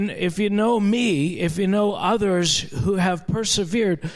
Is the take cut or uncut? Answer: uncut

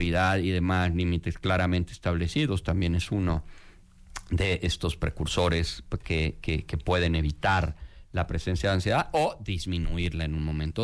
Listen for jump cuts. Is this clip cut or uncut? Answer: uncut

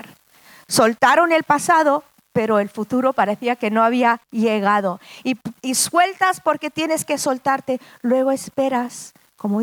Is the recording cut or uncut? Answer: cut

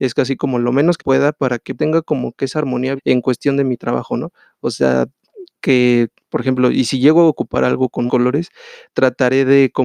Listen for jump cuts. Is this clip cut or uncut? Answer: cut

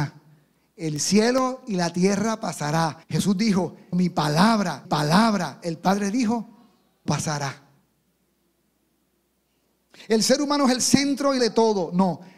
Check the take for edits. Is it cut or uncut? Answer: cut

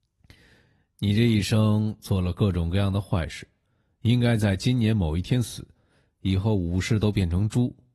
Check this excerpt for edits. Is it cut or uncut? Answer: uncut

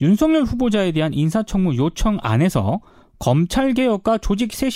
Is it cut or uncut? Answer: uncut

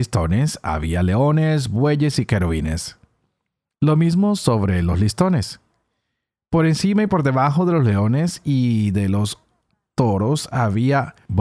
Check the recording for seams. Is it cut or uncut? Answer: uncut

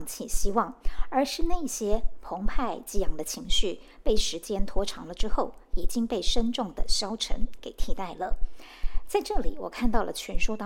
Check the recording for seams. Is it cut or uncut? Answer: uncut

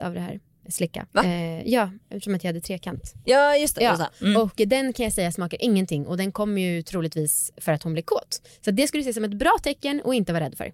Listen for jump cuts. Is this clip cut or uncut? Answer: cut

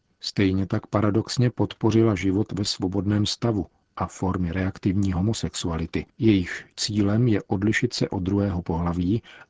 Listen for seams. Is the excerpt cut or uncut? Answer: uncut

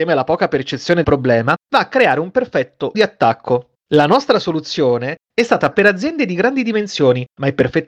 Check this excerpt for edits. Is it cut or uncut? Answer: cut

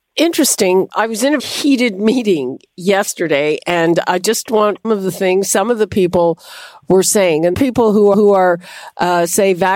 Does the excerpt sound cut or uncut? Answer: cut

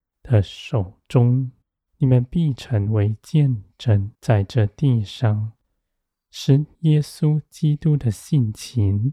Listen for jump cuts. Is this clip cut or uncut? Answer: cut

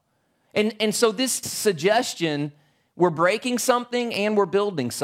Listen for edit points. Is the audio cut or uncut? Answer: cut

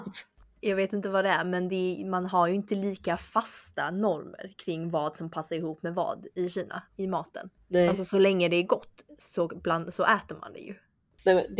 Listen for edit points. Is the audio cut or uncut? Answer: cut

